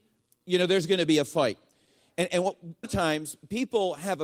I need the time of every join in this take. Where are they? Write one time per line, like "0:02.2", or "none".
0:02.8